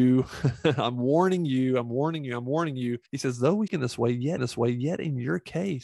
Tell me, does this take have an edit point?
yes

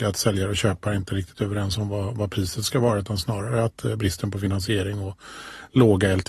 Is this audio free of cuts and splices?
yes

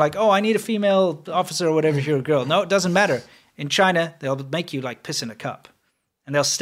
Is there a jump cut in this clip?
no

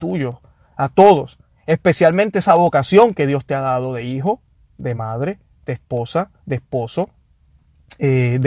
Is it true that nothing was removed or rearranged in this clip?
yes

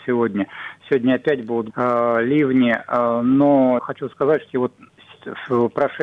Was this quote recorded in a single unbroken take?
no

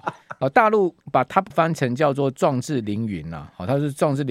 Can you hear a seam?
yes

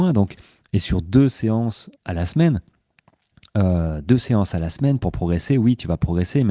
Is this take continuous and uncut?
no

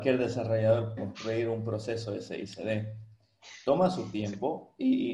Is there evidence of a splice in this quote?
yes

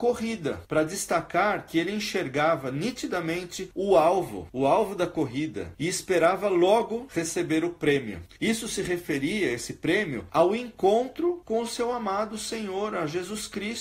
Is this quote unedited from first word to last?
yes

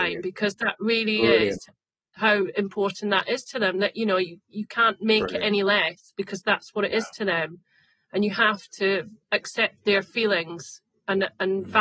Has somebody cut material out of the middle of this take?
no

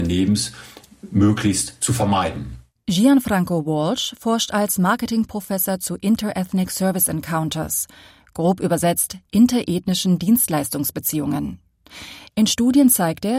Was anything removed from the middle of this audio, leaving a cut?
no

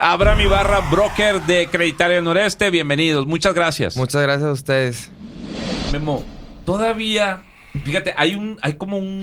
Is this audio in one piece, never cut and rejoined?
yes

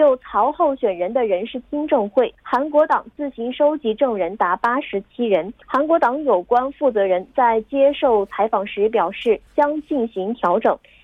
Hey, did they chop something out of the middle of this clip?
yes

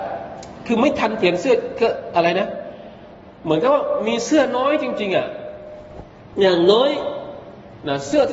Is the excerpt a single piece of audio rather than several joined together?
yes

